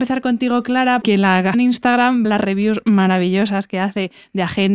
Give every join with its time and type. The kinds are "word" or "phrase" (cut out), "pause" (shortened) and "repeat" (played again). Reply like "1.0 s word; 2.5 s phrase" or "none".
1.0 s word; 1.5 s word; 2.2 s word